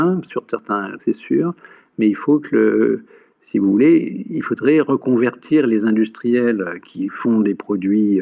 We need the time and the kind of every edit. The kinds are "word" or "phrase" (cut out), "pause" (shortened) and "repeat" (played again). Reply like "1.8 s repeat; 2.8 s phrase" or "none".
1.0 s word; 6.8 s word